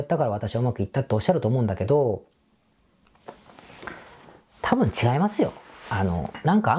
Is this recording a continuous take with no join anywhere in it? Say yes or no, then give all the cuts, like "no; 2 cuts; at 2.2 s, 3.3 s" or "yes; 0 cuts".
yes; 0 cuts